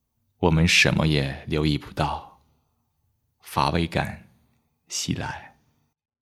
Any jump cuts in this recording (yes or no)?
no